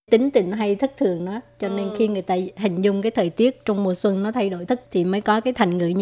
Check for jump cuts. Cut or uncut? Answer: cut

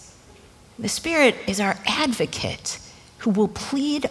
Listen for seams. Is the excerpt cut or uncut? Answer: uncut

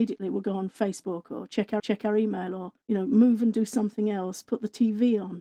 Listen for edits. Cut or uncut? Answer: cut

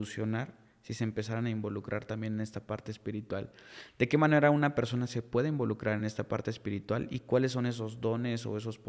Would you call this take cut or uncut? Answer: uncut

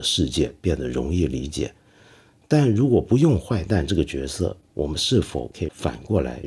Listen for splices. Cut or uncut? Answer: uncut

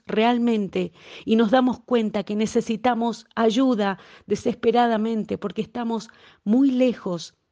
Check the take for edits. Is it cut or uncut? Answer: uncut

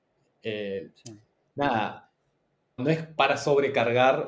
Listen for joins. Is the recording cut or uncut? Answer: cut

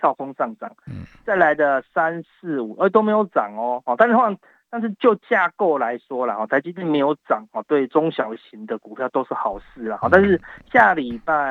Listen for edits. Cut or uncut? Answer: uncut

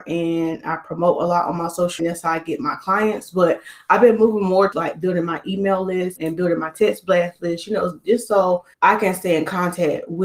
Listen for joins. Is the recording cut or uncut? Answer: cut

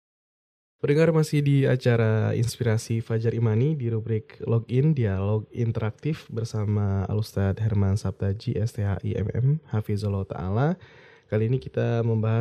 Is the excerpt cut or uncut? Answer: uncut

